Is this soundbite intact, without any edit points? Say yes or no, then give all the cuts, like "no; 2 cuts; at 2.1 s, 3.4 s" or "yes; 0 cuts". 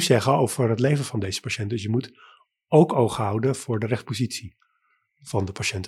yes; 0 cuts